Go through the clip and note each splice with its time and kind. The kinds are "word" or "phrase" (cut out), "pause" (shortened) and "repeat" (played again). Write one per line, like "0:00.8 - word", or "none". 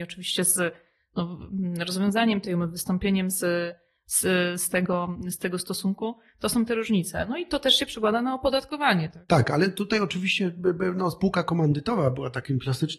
none